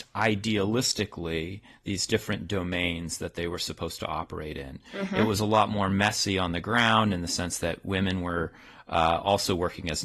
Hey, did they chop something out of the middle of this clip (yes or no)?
no